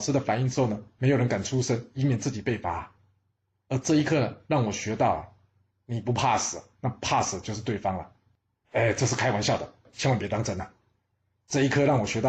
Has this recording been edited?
no; 0 cuts

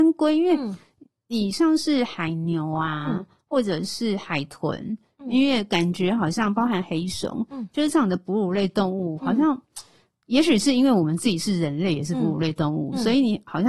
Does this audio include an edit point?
no; 0 cuts

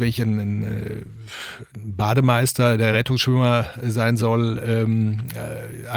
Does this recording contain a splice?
no; 0 cuts

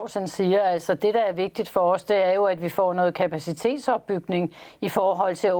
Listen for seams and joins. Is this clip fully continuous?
yes; 0 cuts

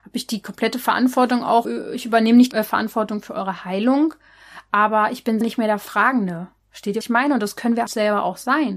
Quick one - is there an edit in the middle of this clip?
yes; 6 cuts; at 1.6 s, 2.5 s, 5.4 s, 6.6 s, 7.0 s, 7.9 s

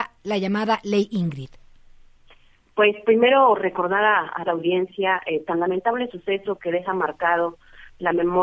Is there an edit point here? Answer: yes; 1 cut; at 4.5 s

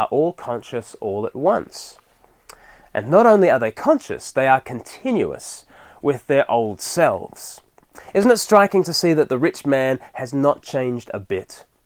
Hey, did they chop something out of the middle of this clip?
no; 0 cuts

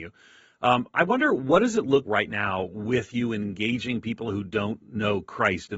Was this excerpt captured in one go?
no; 1 cut; at 2.0 s

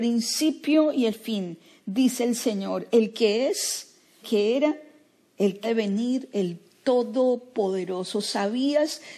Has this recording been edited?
yes; 2 cuts; at 4.2 s, 5.6 s

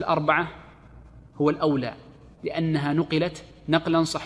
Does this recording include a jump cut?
no; 0 cuts

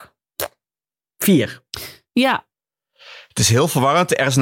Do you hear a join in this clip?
no; 0 cuts

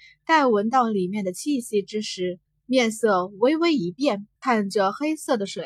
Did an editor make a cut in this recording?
yes; 2 cuts; at 2.5 s, 4.4 s

